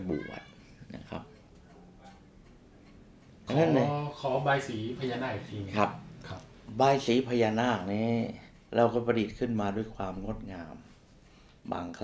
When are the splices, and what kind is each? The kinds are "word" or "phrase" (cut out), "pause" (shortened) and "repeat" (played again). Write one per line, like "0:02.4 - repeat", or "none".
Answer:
0:08.6 - pause